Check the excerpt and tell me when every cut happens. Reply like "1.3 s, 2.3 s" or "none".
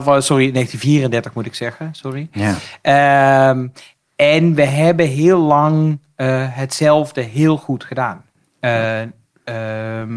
none